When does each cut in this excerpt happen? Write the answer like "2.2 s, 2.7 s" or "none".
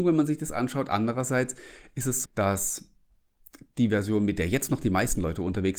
2.2 s